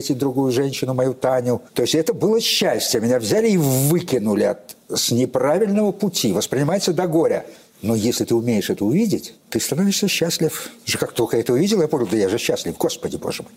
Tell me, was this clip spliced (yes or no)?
no